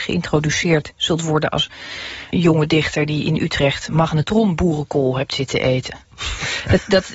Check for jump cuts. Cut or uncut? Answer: cut